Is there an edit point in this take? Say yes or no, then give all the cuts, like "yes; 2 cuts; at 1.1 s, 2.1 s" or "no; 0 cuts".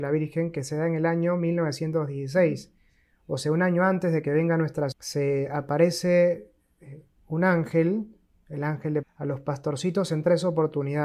yes; 2 cuts; at 4.9 s, 9.0 s